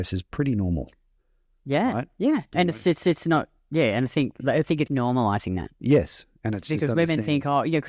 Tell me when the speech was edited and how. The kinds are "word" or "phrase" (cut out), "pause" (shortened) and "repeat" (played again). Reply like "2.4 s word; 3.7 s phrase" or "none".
3.0 s repeat; 4.9 s word